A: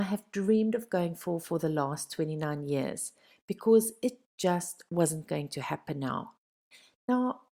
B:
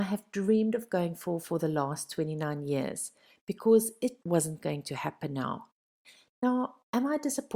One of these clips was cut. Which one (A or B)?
B